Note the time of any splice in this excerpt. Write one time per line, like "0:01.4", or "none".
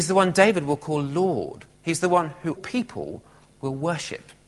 0:01.7
0:02.6